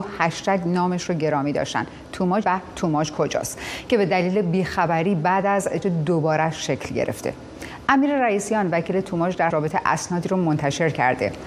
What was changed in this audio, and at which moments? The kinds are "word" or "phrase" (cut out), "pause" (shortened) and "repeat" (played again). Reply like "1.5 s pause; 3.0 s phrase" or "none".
2.4 s word; 5.8 s phrase; 9.5 s word

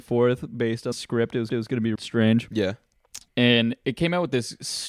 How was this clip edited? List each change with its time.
0.9 s word; 1.5 s repeat; 1.9 s word; 3.3 s pause

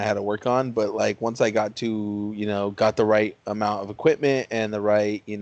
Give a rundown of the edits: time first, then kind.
none

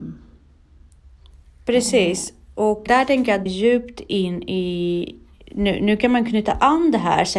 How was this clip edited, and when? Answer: 2.9 s word; 3.5 s phrase

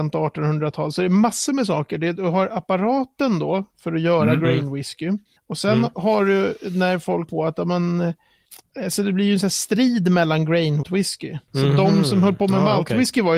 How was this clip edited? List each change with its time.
5.4 s pause; 7.3 s word; 10.8 s phrase

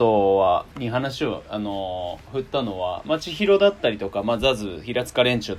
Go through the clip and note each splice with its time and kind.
none

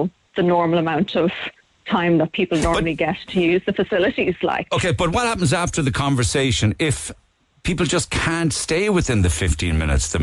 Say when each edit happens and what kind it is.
none

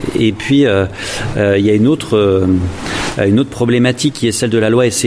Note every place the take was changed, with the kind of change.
none

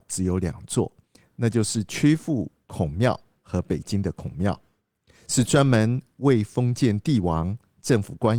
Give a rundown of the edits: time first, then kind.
none

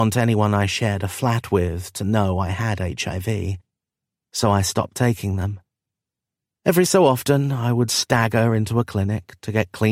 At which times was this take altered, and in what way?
none

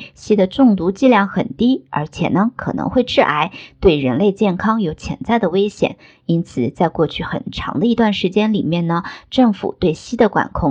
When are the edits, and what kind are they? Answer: none

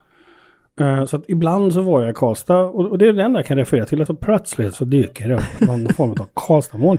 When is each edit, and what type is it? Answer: 4.1 s word; 4.7 s word; 5.6 s word

